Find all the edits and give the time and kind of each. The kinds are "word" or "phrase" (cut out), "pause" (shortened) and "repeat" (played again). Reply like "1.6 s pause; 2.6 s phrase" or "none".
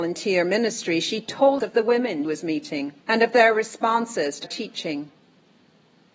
1.6 s word; 2.2 s word; 3.0 s pause; 4.4 s word

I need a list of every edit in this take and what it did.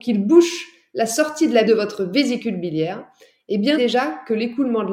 1.7 s word; 3.8 s word

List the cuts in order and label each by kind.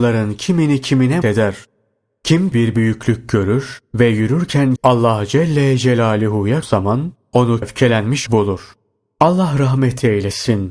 1.2 s word; 2.5 s word; 4.8 s word; 6.6 s word; 7.6 s word; 8.3 s word

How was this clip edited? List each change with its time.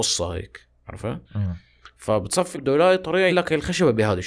1.2 s pause; 2.5 s phrase; 3.3 s word

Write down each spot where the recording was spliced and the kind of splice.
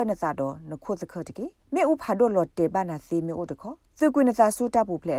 1.6 s pause; 3.8 s pause

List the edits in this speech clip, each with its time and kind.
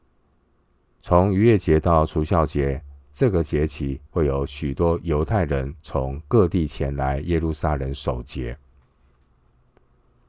4.1 s pause; 5.8 s pause

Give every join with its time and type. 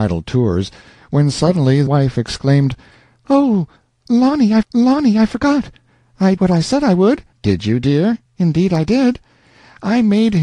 1.9 s word; 4.6 s repeat; 6.4 s word; 7.3 s pause; 8.3 s pause

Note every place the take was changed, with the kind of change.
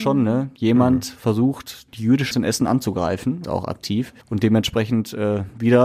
1.9 s phrase; 2.3 s phrase; 3.4 s phrase; 4.2 s pause

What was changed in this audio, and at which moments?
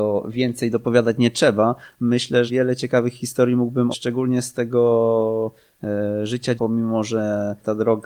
2.5 s word; 3.9 s word; 6.6 s word

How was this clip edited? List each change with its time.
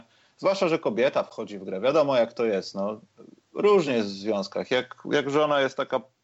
none

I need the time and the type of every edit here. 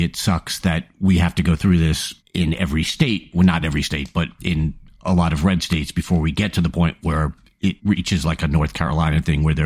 none

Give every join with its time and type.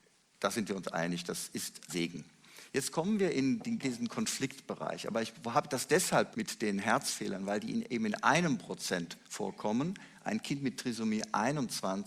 1.9 s word; 3.8 s word; 6.3 s word

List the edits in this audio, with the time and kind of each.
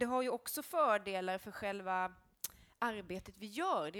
none

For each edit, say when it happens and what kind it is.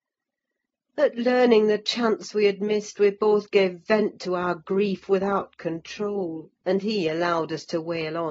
6.6 s pause

